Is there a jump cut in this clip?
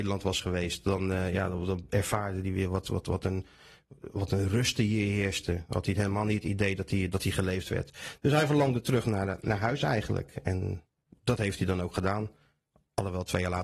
no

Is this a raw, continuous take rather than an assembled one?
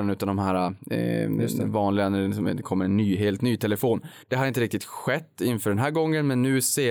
no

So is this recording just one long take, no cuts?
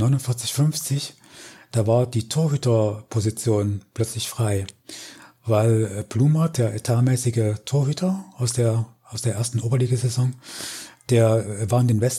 yes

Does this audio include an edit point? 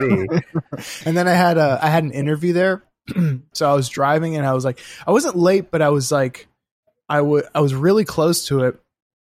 no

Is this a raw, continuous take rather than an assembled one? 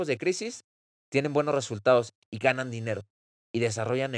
yes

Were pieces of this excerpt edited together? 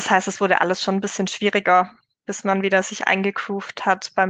no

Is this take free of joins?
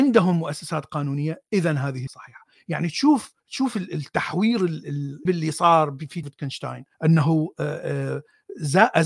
no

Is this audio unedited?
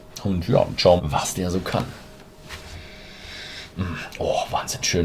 no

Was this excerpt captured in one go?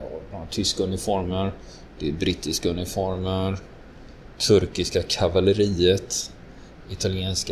yes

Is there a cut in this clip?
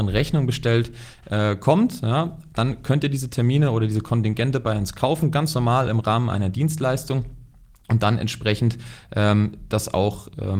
no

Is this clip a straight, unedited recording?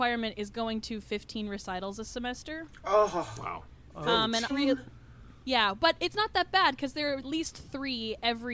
no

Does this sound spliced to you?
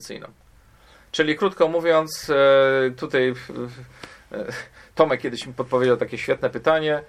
no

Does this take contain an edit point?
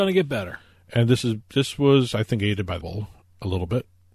yes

